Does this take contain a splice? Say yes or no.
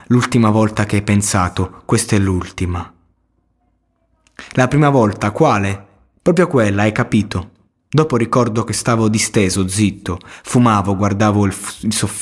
no